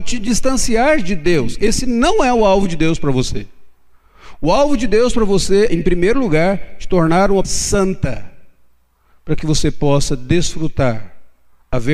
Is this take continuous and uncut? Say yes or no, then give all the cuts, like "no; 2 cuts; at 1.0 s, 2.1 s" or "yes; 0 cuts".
no; 2 cuts; at 5.7 s, 7.4 s